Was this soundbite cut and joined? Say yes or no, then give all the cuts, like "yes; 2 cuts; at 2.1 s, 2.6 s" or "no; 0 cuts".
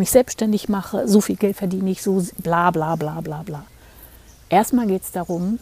no; 0 cuts